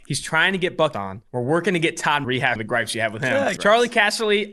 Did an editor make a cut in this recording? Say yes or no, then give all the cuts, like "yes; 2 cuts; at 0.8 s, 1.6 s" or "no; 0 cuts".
yes; 5 cuts; at 0.9 s, 1.3 s, 2.2 s, 2.6 s, 3.6 s